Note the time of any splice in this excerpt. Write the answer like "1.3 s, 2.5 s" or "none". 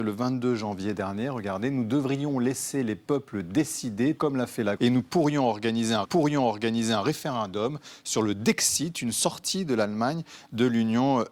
4.2 s, 4.8 s, 6.0 s